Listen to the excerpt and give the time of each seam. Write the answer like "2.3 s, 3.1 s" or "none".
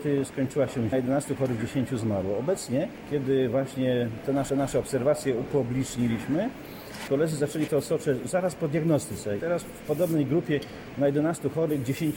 0.9 s, 4.5 s, 7.1 s, 7.7 s, 9.4 s

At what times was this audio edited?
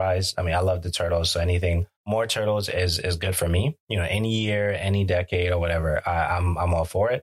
2.0 s, 3.8 s

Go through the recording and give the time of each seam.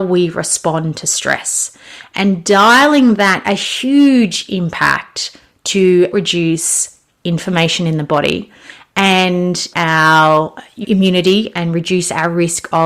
3.4 s, 6.1 s, 9.7 s, 10.8 s

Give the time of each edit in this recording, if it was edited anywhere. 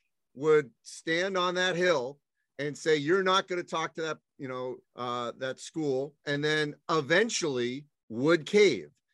4.8 s, 6.2 s

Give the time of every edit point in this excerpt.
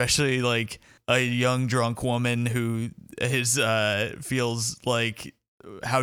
1.0 s

